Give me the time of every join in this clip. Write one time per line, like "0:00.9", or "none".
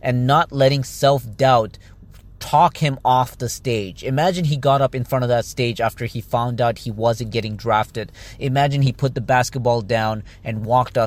none